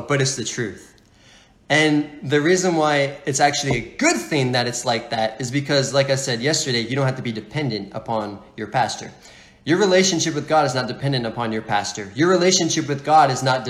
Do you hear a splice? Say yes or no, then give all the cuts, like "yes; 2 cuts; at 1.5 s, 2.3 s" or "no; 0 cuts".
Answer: no; 0 cuts